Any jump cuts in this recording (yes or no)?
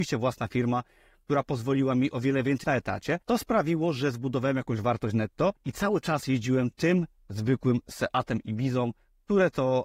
yes